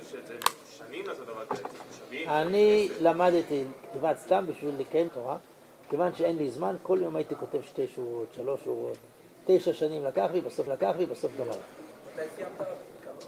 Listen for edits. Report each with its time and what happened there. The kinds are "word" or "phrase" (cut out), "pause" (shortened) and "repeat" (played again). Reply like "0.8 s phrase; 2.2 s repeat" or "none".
3.8 s pause; 5.1 s phrase; 10.7 s repeat